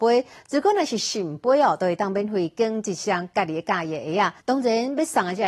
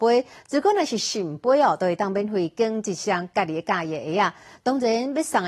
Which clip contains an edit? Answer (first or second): first